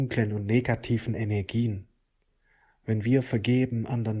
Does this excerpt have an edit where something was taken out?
no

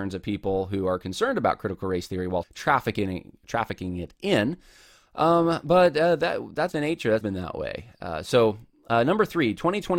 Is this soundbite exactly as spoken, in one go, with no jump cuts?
no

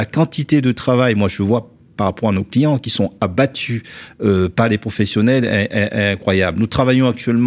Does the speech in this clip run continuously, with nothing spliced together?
yes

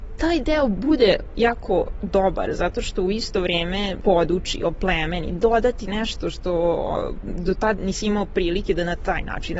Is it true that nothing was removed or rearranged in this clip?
no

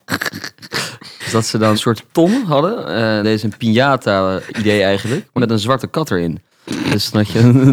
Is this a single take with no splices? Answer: no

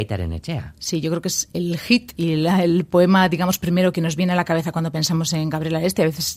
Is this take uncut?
yes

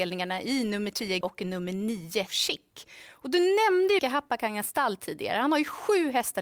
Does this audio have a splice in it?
yes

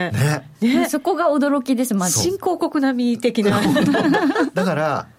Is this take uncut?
yes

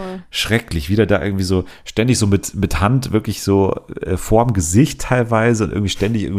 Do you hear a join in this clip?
no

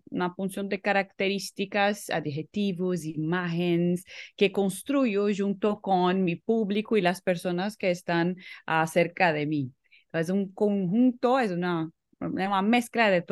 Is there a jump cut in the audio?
no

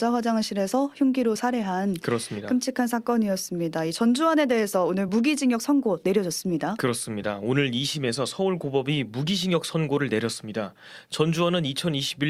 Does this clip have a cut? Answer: no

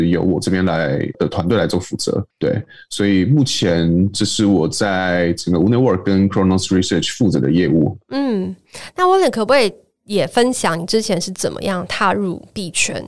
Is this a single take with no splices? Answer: no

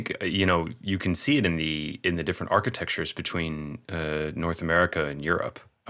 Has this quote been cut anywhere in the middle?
no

